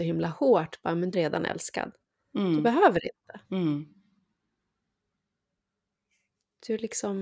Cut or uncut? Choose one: cut